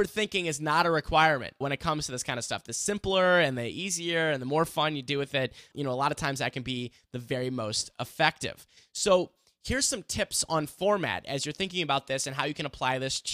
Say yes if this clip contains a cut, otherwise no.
yes